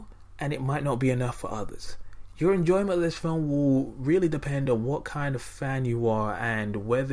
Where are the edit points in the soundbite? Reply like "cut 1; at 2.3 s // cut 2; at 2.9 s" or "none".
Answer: none